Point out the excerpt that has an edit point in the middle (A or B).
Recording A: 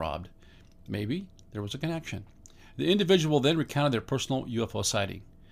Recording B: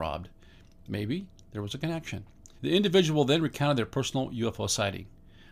B